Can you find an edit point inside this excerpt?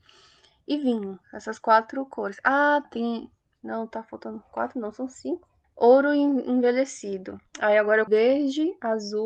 yes; 4 cuts; at 1.2 s, 2.8 s, 5.6 s, 8.1 s

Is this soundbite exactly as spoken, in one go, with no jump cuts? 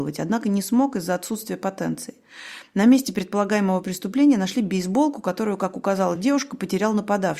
yes; 0 cuts

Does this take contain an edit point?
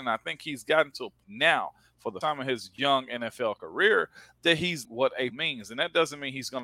yes; 4 cuts; at 1.2 s, 2.2 s, 4.8 s, 5.3 s

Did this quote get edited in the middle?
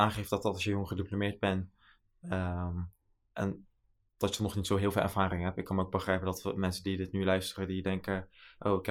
no; 0 cuts

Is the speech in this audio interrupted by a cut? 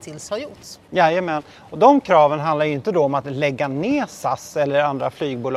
no; 0 cuts

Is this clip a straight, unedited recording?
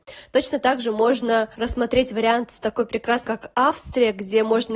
no; 2 cuts; at 1.5 s, 3.2 s

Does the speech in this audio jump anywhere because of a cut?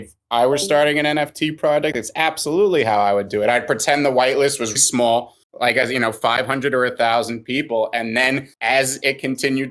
yes; 3 cuts; at 4.8 s, 5.4 s, 8.5 s

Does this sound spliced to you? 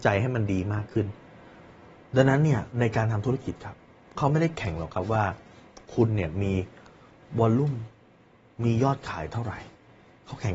yes; 1 cut; at 2.7 s

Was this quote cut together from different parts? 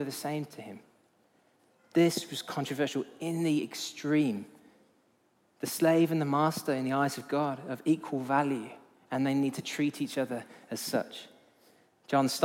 no; 0 cuts

